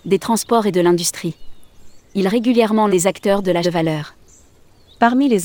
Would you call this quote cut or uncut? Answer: cut